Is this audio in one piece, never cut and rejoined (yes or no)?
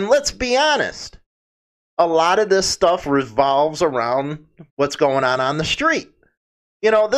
yes